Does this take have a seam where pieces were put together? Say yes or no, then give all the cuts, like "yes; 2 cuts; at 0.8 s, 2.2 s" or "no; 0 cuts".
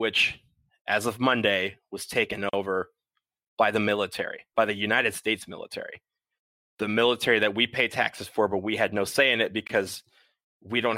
no; 0 cuts